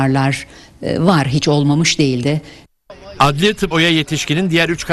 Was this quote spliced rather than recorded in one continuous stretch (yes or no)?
yes